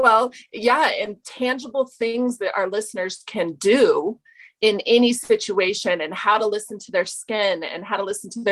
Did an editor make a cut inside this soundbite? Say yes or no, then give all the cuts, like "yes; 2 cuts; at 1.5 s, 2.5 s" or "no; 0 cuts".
no; 0 cuts